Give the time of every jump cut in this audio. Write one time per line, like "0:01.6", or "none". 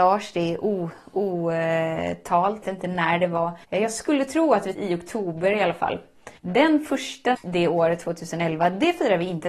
0:02.6
0:03.6
0:04.7
0:06.4
0:07.3